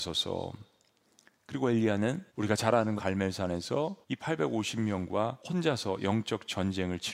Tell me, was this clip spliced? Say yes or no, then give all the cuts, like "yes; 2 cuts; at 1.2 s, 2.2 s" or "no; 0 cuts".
yes; 4 cuts; at 2.3 s, 3.0 s, 4.0 s, 5.4 s